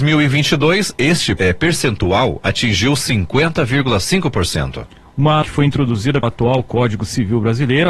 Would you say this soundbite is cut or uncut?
cut